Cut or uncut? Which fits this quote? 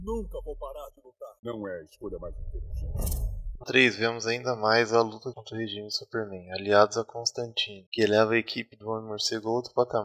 cut